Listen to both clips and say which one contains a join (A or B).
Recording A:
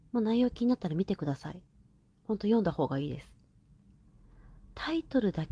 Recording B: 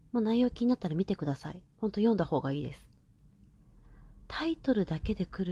B